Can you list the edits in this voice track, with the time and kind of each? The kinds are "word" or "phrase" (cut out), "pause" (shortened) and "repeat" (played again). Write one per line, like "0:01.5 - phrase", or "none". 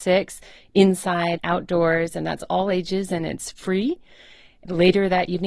0:01.4 - word

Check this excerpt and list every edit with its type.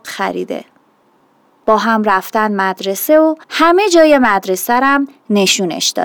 0:03.4 - pause

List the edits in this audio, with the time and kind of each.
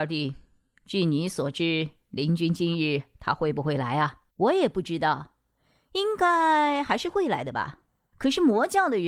0:04.3 - pause

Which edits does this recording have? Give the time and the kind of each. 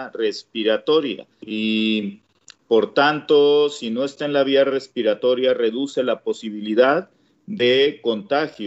none

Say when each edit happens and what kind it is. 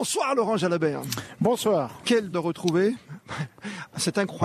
0:02.3 - word

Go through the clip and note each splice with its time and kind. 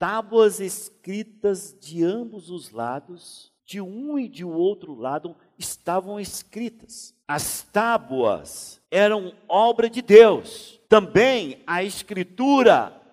0:03.6 - pause
0:07.2 - pause
0:08.8 - pause
0:10.8 - pause

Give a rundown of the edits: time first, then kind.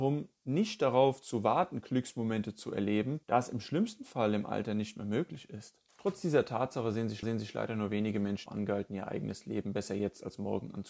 0:03.2 - pause
0:05.9 - pause
0:07.2 - repeat
0:08.5 - word

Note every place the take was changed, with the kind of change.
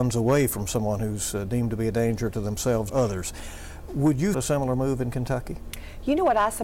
0:02.9 - word
0:04.3 - word

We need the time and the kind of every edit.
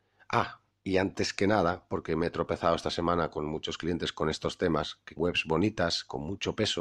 0:05.2 - word

